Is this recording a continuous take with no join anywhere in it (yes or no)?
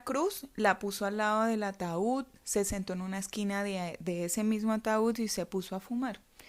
yes